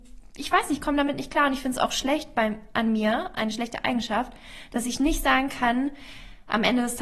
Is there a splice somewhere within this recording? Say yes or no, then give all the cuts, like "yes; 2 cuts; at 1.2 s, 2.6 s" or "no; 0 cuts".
no; 0 cuts